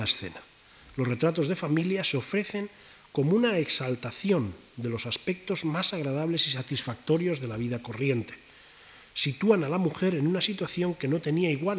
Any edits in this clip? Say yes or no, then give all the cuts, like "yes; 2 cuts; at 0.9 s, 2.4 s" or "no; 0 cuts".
no; 0 cuts